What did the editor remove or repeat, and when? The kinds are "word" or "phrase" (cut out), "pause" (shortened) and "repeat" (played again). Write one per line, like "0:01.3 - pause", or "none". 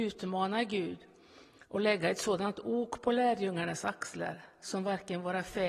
none